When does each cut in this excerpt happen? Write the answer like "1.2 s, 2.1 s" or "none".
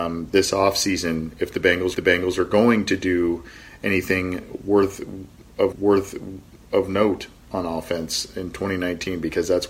1.9 s, 5.7 s

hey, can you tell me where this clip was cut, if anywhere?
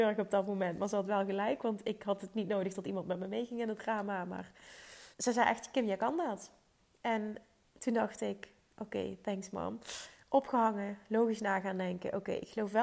5.1 s

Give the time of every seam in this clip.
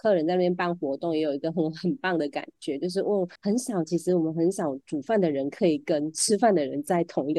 3.4 s

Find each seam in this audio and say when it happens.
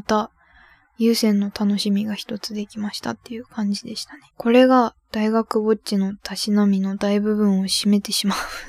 4.3 s

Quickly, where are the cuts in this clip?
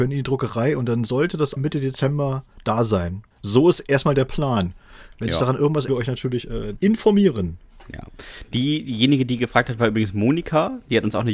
1.6 s, 3.3 s, 5.9 s, 6.8 s

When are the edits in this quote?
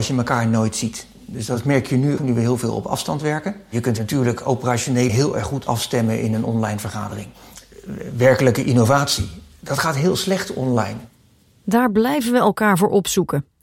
2.2 s, 5.1 s

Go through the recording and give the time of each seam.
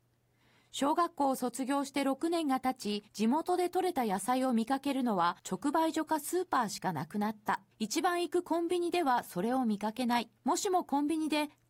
3.1 s, 5.4 s, 7.7 s, 10.4 s

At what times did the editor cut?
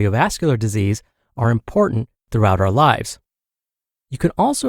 none

